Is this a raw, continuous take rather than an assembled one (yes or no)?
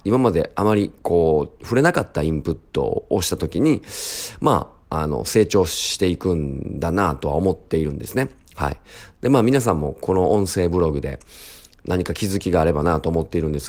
yes